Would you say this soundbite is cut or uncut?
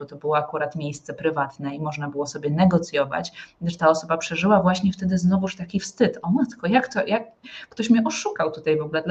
uncut